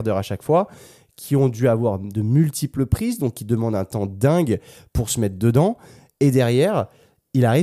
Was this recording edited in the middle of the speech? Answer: no; 0 cuts

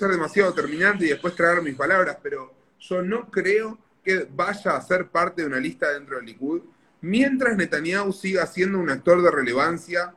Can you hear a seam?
yes; 1 cut; at 4.0 s

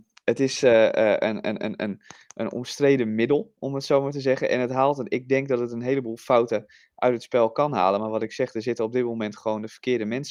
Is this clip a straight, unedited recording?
yes; 0 cuts

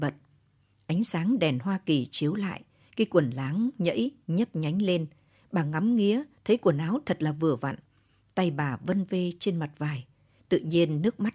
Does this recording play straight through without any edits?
yes; 0 cuts

